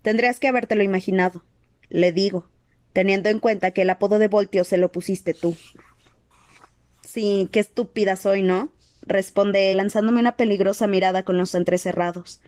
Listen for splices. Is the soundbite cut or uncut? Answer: cut